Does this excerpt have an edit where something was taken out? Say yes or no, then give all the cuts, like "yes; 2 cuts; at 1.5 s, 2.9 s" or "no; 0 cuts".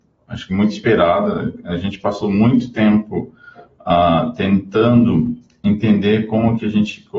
no; 0 cuts